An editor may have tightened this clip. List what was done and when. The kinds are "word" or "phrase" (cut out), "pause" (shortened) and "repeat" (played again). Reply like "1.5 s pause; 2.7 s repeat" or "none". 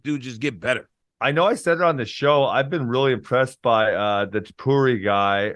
1.0 s pause